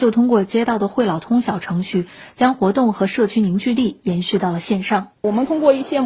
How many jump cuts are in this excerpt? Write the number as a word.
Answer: one